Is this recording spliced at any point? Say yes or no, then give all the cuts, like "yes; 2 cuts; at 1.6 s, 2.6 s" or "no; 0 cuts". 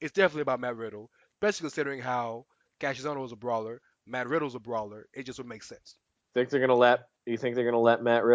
no; 0 cuts